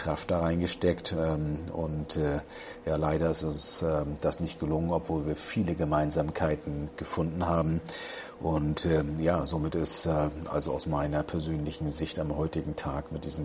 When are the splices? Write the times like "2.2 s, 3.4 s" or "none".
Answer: none